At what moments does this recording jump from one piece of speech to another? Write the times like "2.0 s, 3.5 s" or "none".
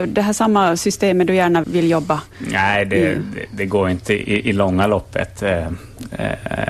1.6 s